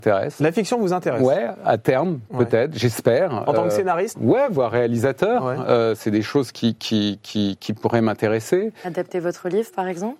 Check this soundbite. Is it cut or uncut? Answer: cut